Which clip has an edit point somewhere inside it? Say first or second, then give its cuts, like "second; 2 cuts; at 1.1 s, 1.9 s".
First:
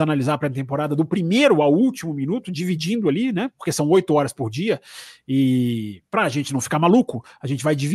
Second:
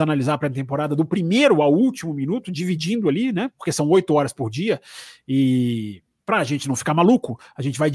first; 1 cut; at 6.0 s